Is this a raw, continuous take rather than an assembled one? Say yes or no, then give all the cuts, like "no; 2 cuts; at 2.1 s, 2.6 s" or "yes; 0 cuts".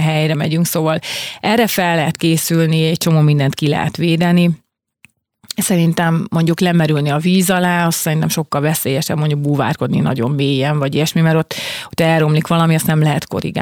yes; 0 cuts